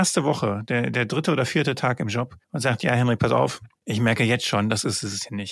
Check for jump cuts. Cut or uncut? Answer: cut